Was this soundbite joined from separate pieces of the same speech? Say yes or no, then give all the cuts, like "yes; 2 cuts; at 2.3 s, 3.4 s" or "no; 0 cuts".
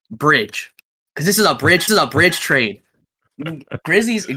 yes; 1 cut; at 1.9 s